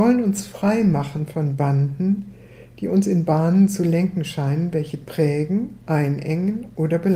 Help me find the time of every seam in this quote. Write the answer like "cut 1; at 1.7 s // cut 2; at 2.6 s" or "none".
none